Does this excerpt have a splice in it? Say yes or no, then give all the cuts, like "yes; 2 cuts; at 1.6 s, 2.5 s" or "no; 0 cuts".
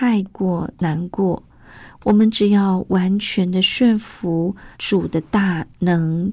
yes; 1 cut; at 4.7 s